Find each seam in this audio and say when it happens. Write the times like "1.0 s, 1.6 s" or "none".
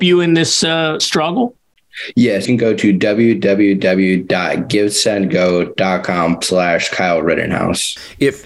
1.0 s, 2.4 s, 6.4 s